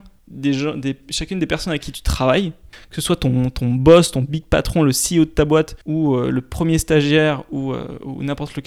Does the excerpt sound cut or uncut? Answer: cut